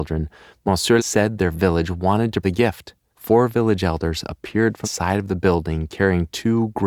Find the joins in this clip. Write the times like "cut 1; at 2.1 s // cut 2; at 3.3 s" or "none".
cut 1; at 1.0 s // cut 2; at 2.4 s // cut 3; at 3.1 s // cut 4; at 4.8 s